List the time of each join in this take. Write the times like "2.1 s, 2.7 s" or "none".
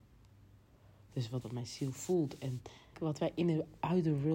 1.4 s, 2.9 s